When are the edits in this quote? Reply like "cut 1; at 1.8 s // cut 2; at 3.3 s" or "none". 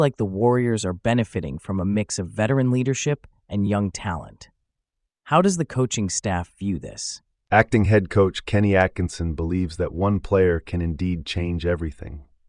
none